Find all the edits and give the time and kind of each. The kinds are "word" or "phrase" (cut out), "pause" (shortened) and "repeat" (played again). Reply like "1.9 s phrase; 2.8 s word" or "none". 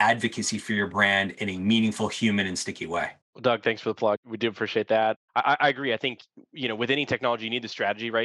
3.2 s pause; 5.2 s pause

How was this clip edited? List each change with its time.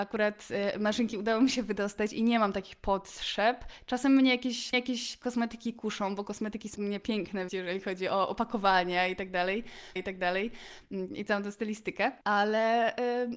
4.7 s repeat; 6.8 s word; 7.5 s word; 10.0 s repeat; 12.2 s pause

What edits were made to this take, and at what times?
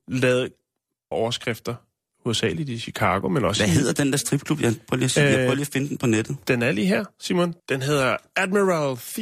1.1 s word; 7.6 s pause

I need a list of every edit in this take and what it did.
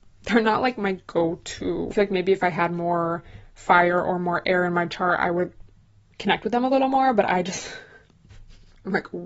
none

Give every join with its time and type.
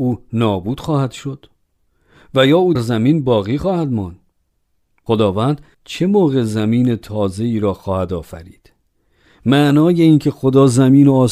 2.7 s word

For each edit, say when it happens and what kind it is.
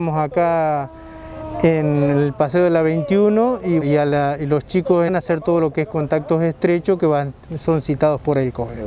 3.8 s word; 5.1 s phrase

